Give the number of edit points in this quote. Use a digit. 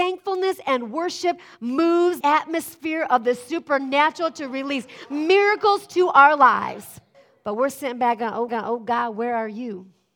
3